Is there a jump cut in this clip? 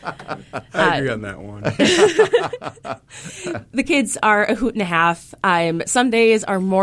no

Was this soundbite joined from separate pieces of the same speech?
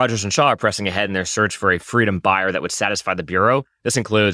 no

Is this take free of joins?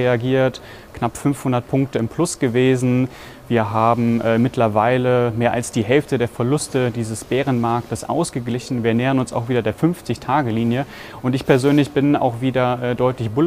yes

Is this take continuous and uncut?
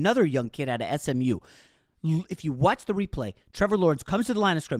yes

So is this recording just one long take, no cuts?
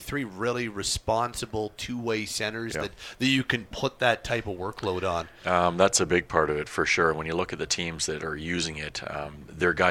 yes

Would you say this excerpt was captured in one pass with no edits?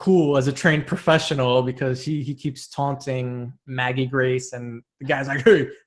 yes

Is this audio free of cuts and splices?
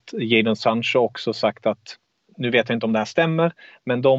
yes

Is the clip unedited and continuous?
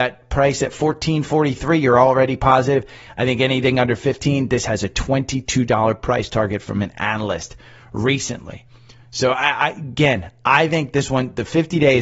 yes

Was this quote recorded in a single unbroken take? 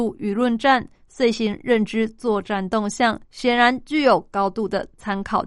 no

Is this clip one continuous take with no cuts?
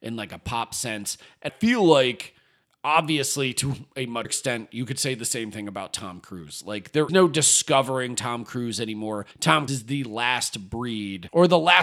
no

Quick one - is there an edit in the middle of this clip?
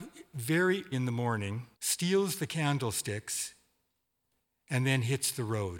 yes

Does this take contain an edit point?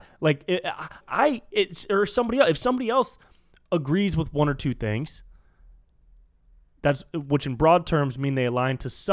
yes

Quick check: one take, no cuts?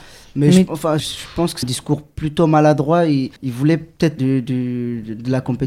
no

